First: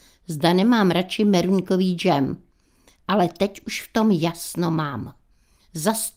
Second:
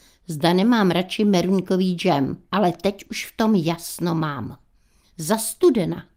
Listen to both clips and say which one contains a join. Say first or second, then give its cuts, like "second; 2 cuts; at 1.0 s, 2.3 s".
second; 1 cut; at 2.5 s